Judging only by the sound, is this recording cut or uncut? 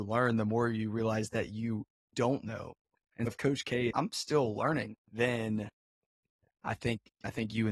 cut